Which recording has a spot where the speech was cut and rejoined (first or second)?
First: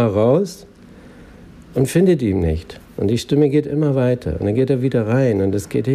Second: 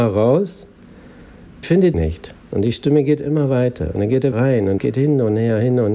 second